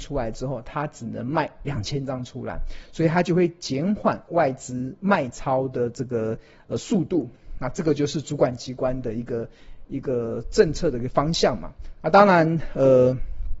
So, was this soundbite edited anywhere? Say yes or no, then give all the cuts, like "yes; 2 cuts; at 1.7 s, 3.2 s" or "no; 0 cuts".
no; 0 cuts